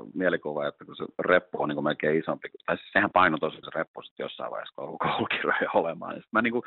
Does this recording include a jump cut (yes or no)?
yes